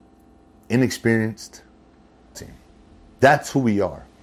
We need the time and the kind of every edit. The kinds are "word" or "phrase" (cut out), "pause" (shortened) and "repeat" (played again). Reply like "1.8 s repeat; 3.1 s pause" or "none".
2.3 s word